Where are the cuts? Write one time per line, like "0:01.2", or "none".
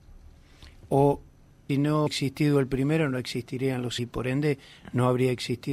0:01.7
0:02.1
0:04.0